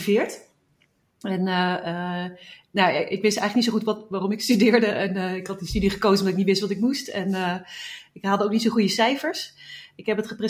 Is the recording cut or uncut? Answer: uncut